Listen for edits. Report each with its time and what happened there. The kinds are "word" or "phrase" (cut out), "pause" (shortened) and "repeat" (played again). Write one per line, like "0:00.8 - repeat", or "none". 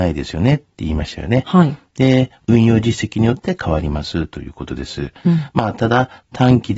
none